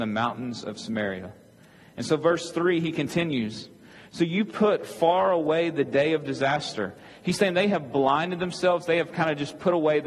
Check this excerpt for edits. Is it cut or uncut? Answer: uncut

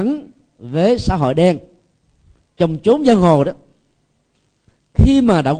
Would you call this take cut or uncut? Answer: uncut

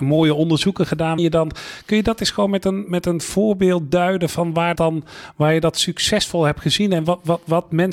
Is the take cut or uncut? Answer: cut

